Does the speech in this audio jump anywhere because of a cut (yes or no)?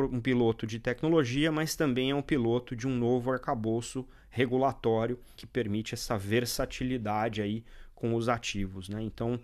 yes